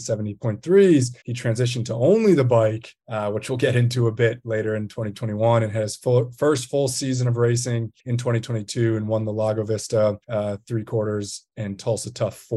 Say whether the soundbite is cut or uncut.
cut